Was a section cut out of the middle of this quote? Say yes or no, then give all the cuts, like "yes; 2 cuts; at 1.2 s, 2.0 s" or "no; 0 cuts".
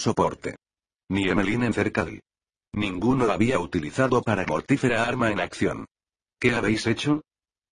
yes; 5 cuts; at 1.7 s, 2.1 s, 3.3 s, 4.5 s, 5.3 s